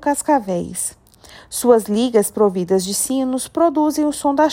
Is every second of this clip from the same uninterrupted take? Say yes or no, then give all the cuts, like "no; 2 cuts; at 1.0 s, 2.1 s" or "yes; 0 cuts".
yes; 0 cuts